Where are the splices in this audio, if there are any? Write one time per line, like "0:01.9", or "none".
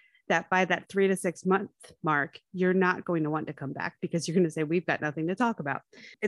none